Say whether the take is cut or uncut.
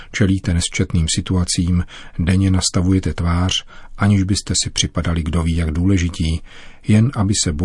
uncut